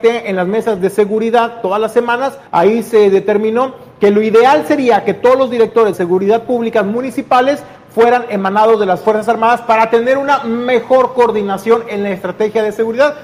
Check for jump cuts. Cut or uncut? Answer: cut